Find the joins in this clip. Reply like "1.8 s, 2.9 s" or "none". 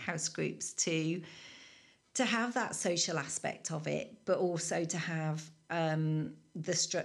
none